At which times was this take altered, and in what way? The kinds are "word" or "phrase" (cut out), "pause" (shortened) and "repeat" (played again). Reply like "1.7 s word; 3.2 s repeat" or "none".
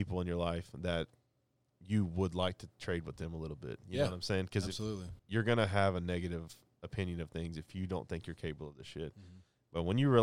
5.2 s pause